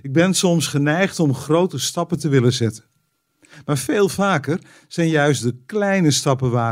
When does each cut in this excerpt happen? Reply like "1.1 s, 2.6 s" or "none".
none